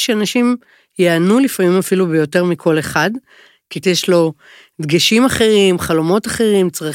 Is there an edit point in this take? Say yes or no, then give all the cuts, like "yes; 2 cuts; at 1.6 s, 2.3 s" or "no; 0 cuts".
yes; 1 cut; at 3.8 s